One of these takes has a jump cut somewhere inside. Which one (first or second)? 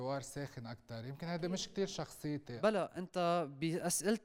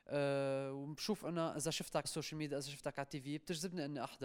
second